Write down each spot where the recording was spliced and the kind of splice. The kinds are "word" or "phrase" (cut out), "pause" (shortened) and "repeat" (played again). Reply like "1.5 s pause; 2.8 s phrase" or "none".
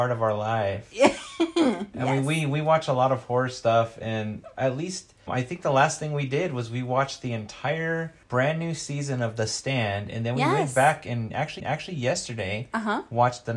5.3 s word; 8.2 s pause; 11.6 s repeat